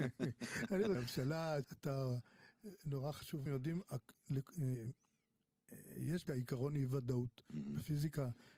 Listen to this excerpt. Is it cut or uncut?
cut